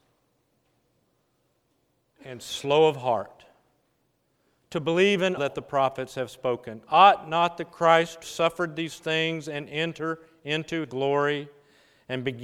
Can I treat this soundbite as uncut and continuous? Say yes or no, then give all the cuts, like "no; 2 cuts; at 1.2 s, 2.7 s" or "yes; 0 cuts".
no; 3 cuts; at 5.4 s, 8.2 s, 10.8 s